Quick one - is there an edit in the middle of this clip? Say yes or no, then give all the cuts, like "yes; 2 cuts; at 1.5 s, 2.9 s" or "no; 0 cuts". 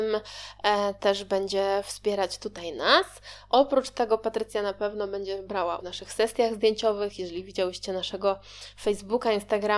yes; 1 cut; at 5.8 s